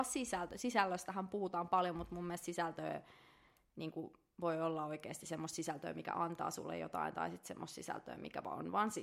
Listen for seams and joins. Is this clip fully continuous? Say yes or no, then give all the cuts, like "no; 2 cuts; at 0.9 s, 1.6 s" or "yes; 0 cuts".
yes; 0 cuts